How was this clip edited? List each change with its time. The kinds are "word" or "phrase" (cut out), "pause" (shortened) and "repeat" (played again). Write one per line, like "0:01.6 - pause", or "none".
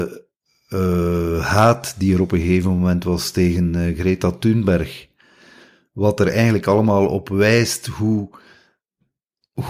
none